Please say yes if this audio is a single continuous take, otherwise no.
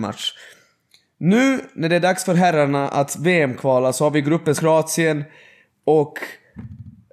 no